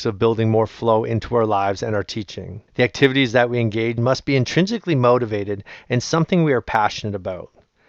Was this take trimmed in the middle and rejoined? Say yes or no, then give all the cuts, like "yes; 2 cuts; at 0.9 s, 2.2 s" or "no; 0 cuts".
yes; 2 cuts; at 2.7 s, 4.0 s